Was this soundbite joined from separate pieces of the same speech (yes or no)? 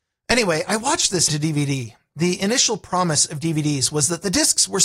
yes